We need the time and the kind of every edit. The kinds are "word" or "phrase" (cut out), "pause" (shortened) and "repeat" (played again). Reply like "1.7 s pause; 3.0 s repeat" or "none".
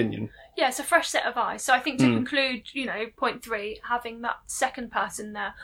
none

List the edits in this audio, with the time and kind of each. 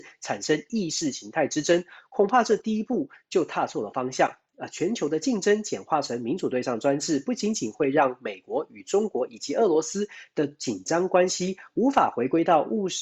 none

